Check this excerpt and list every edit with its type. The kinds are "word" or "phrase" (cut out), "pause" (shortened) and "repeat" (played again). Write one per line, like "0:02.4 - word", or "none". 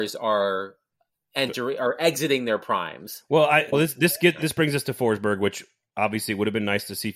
0:03.7 - word